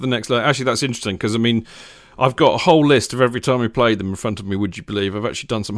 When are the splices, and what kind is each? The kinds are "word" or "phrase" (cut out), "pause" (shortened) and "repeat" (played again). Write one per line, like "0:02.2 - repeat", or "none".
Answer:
none